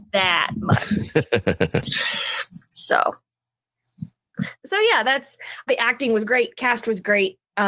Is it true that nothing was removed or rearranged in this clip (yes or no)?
no